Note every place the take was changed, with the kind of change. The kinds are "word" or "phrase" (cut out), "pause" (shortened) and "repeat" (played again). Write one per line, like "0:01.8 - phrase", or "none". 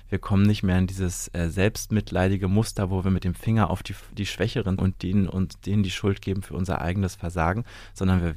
0:04.8 - word